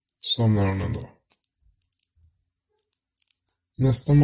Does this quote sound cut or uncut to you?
uncut